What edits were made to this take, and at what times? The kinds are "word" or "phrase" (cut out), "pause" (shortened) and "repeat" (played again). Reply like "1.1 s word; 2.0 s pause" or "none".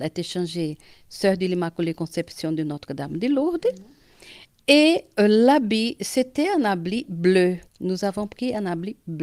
7.6 s pause